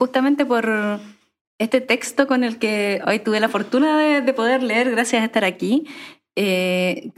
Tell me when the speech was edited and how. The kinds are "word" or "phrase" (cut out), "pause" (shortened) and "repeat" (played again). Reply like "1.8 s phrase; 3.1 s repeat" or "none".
none

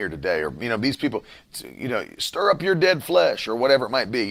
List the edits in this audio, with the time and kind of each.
none

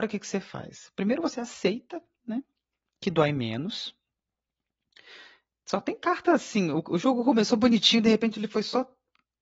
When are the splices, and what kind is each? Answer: none

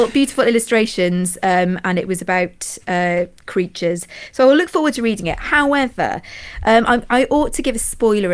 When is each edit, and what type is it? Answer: none

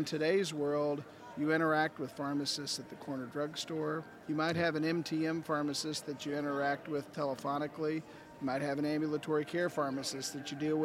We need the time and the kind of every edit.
none

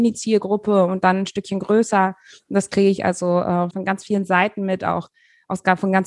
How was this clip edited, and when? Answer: 3.7 s word

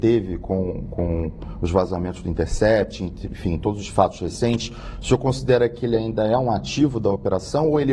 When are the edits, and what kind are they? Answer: none

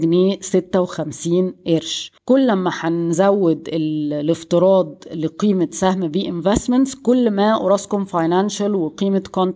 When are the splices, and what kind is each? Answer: 2.2 s pause

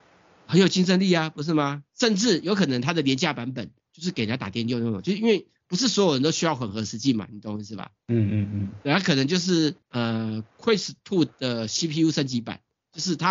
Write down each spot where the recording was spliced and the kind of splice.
1.9 s pause; 3.8 s pause; 8.0 s pause; 9.8 s pause

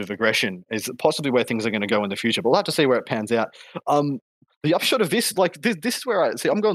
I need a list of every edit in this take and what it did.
none

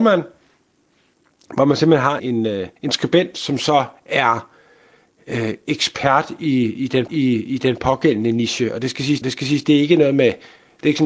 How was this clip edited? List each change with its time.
2.2 s word; 2.8 s pause; 7.1 s repeat; 9.2 s repeat

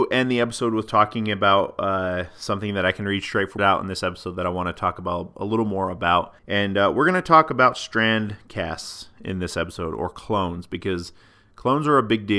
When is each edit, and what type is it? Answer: 3.6 s phrase; 6.4 s pause

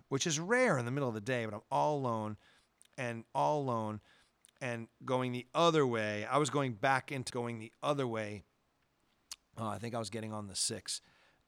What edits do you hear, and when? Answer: 3.3 s repeat; 7.3 s word

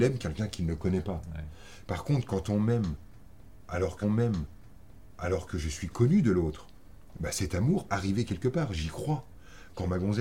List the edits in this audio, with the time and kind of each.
4.0 s repeat; 7.9 s word

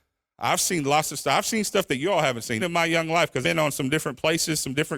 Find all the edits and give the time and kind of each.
2.6 s word; 3.4 s word

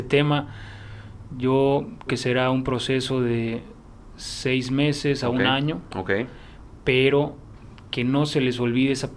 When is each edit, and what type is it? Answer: 2.1 s word

